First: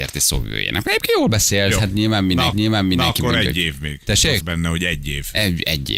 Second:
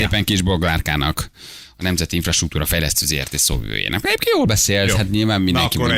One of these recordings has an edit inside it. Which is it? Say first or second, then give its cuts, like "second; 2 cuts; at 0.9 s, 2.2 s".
first; 2 cuts; at 2.5 s, 4.4 s